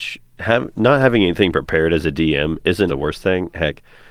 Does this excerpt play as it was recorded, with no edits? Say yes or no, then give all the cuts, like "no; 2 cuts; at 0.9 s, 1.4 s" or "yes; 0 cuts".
no; 1 cut; at 2.9 s